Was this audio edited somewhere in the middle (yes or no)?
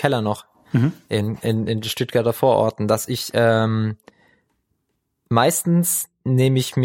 no